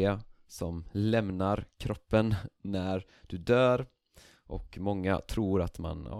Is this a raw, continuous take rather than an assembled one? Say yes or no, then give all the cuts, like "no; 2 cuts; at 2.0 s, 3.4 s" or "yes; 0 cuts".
yes; 0 cuts